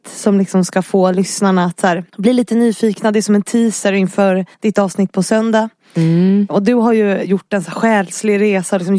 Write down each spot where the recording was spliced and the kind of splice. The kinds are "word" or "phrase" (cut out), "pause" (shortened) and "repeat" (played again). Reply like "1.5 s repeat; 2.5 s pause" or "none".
2.1 s pause; 4.5 s pause